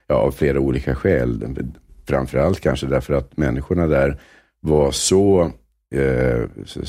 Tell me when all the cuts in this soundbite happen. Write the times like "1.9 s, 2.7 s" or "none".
none